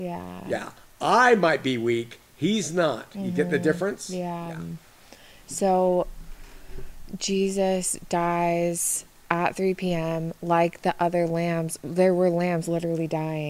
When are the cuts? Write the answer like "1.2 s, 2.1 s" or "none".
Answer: none